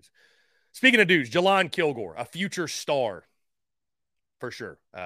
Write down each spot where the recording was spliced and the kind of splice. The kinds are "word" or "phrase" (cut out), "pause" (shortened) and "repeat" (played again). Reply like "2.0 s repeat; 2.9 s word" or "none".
none

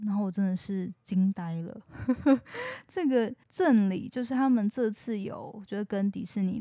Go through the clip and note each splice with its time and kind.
3.4 s pause

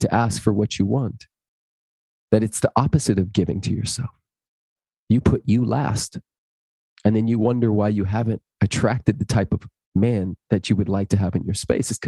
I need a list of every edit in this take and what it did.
8.6 s word

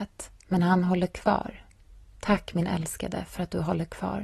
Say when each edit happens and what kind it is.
none

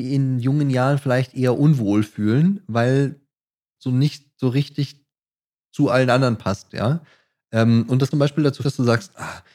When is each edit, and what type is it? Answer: 3.8 s word; 8.1 s word; 8.6 s word

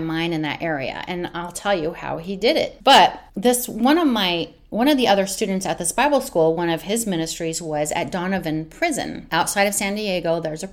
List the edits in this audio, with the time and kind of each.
3.3 s pause

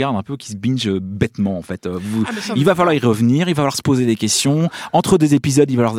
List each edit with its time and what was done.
none

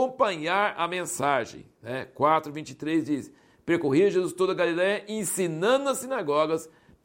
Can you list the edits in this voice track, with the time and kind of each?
none

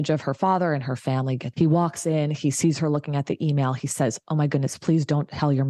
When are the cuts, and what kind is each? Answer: 1.5 s word

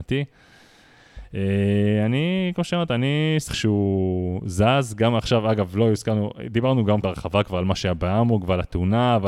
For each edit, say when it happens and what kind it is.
3.5 s word; 7.0 s word

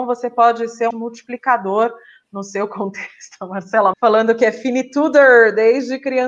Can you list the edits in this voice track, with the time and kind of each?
0.9 s word; 3.9 s word

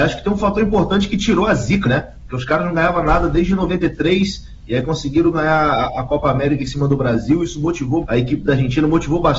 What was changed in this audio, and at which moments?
1.8 s word; 8.0 s word

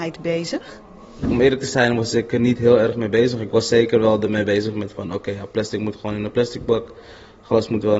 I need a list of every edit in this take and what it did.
none

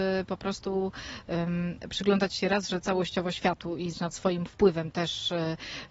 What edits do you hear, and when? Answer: 3.9 s word

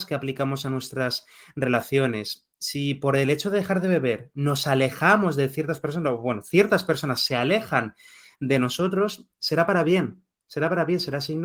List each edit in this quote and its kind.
none

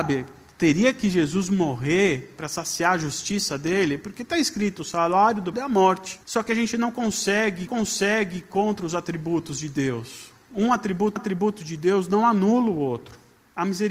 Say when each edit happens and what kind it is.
5.5 s word; 6.2 s pause; 7.7 s repeat; 11.2 s repeat

